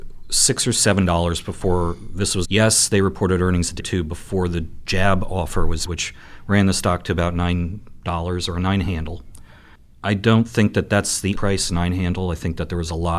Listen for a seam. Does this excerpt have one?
yes; 4 cuts; at 2.4 s, 3.8 s, 5.8 s, 11.3 s

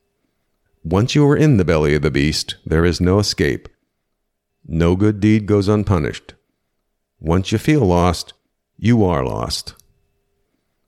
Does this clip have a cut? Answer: no; 0 cuts

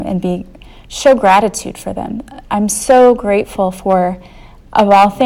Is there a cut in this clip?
no; 0 cuts

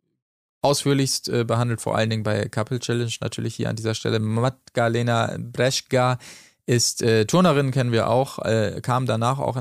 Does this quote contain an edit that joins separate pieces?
no; 0 cuts

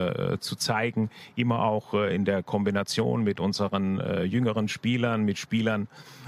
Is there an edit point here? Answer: no; 0 cuts

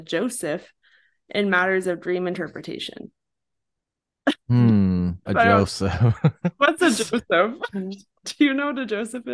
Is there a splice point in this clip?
yes; 1 cut; at 5.3 s

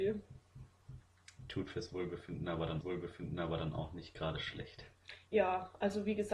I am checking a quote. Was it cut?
yes; 1 cut; at 2.8 s

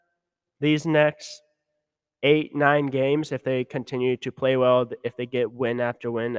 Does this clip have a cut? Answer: no; 0 cuts

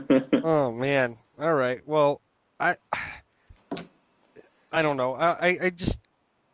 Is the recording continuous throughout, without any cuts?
yes; 0 cuts

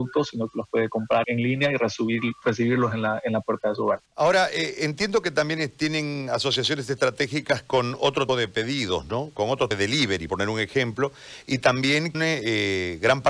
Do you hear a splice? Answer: yes; 6 cuts; at 1.2 s, 4.1 s, 8.3 s, 9.7 s, 10.3 s, 12.1 s

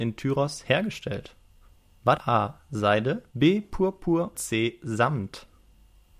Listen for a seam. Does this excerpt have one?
yes; 3 cuts; at 2.2 s, 3.3 s, 4.3 s

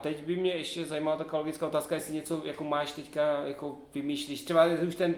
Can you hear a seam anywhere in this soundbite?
no; 0 cuts

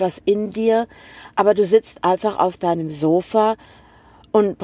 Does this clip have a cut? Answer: no; 0 cuts

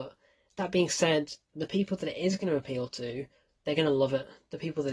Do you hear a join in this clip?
no; 0 cuts

